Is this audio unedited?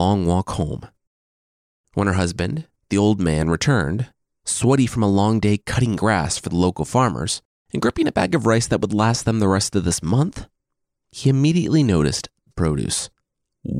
no; 1 cut; at 12.5 s

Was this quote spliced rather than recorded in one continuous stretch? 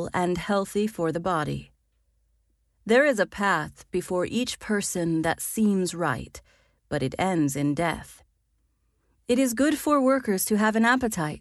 no; 0 cuts

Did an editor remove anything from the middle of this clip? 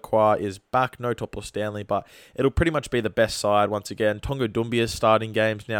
no; 0 cuts

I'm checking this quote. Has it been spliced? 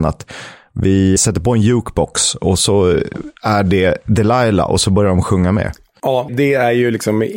yes; 2 cuts; at 1.2 s, 6.3 s

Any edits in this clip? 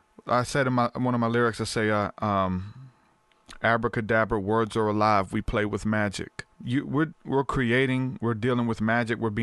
yes; 2 cuts; at 6.5 s, 7.1 s

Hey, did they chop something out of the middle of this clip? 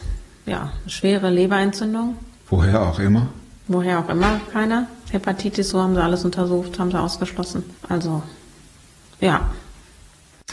yes; 4 cuts; at 2.4 s, 4.5 s, 5.7 s, 7.8 s

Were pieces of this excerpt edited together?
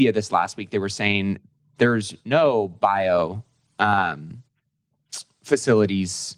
no; 0 cuts

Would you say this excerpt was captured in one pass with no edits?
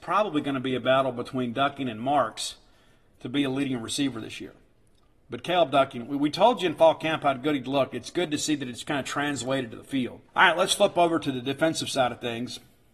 no; 1 cut; at 10.3 s

